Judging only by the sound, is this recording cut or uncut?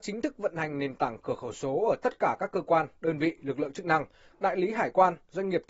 uncut